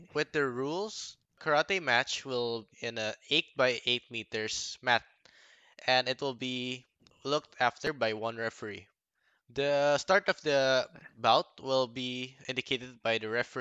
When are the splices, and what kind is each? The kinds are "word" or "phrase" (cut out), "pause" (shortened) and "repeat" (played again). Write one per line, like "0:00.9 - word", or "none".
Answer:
0:02.7 - word